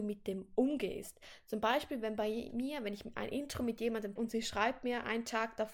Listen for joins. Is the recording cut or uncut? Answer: cut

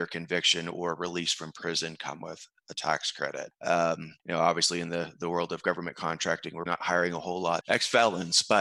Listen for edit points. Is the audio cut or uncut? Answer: cut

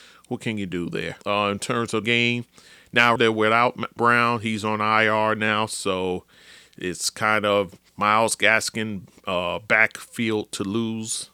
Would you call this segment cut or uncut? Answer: cut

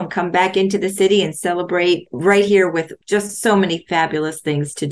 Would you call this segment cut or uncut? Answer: uncut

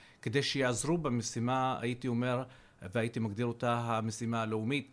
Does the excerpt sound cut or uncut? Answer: uncut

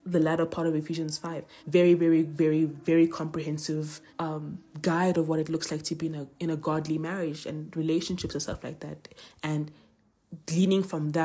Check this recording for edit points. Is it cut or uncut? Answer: cut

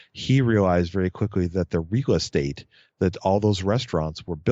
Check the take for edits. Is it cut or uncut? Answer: uncut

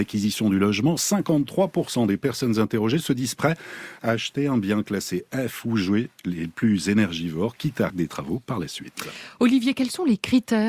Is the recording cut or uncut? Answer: cut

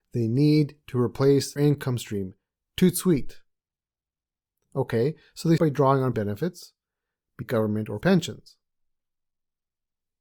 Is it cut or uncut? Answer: cut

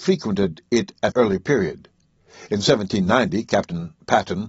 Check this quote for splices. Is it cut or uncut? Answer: cut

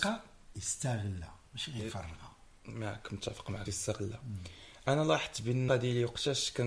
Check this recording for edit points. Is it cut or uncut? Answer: cut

